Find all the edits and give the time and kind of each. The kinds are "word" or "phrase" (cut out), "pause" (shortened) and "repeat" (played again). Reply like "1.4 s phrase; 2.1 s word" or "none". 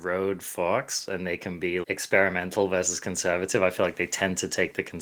1.8 s word